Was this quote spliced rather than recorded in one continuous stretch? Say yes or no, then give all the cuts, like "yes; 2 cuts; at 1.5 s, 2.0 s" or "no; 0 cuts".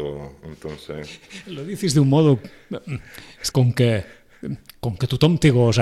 yes; 1 cut; at 3.5 s